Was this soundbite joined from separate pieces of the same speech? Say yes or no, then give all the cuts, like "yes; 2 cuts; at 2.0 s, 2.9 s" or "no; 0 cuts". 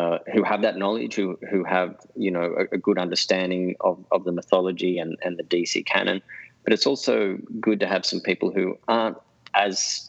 no; 0 cuts